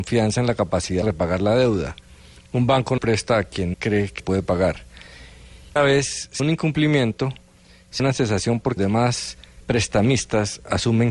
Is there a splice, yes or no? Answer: yes